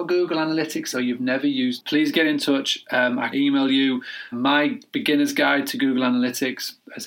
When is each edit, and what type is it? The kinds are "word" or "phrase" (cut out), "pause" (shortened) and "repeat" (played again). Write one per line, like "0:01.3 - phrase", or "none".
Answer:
0:00.9 - word
0:01.8 - word
0:03.3 - word
0:04.3 - word